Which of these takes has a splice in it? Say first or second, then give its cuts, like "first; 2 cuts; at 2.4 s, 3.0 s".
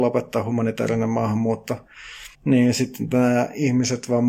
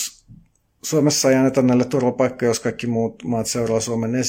first; 1 cut; at 2.3 s